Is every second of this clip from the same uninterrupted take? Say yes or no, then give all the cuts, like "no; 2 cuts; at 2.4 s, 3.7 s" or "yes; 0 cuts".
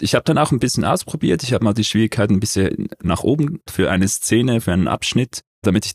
no; 1 cut; at 3.7 s